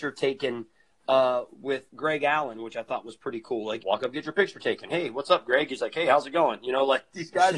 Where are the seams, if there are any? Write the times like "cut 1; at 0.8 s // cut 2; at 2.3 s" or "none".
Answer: cut 1; at 1.9 s // cut 2; at 3.8 s